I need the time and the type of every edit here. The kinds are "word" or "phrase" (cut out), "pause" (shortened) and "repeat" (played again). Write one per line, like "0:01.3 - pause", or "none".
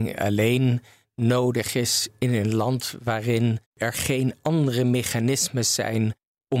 0:03.7 - pause